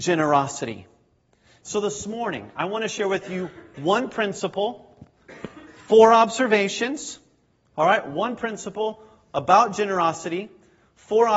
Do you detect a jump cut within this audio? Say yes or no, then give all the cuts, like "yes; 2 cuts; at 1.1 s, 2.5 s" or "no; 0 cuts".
no; 0 cuts